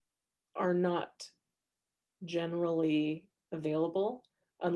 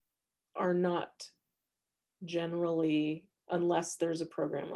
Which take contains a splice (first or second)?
second